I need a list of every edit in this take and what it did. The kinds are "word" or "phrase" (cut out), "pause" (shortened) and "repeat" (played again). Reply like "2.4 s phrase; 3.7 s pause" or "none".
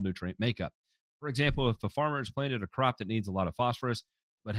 none